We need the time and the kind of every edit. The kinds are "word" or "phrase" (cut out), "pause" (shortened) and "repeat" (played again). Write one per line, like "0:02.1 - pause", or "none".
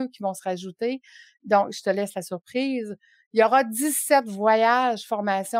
none

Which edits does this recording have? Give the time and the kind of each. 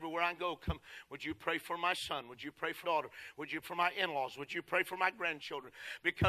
0:02.8 - word
0:03.6 - word

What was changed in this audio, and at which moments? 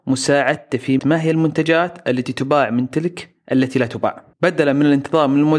0:01.0 - word
0:04.3 - pause

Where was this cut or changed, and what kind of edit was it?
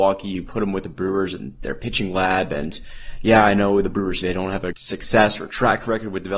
0:04.2 - word
0:04.7 - word

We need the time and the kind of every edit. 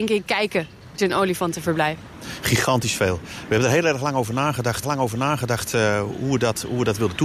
0:01.0 - word
0:04.8 - repeat

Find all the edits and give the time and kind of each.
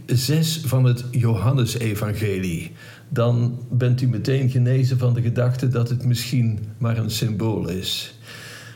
none

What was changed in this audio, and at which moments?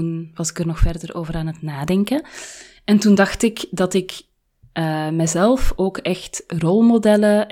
none

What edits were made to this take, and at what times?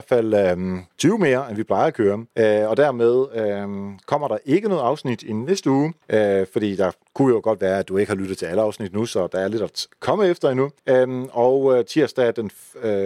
0:00.9 - pause
0:02.3 - pause
0:06.0 - pause
0:10.8 - pause

